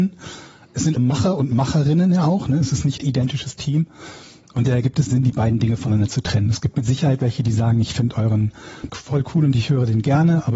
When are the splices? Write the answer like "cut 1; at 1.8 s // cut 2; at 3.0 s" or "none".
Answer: cut 1; at 1.0 s // cut 2; at 3.0 s // cut 3; at 5.1 s // cut 4; at 8.9 s